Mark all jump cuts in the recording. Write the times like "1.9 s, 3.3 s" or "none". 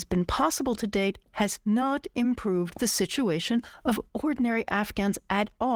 none